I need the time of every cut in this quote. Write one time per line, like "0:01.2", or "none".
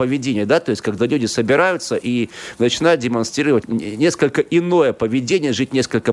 0:03.6